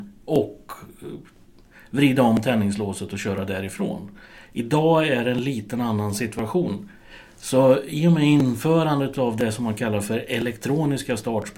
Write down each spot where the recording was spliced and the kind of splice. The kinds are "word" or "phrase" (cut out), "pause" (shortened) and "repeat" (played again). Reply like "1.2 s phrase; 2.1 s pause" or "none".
none